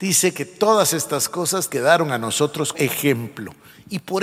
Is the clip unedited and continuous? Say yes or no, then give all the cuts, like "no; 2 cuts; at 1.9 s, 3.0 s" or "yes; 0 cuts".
no; 2 cuts; at 1.7 s, 2.7 s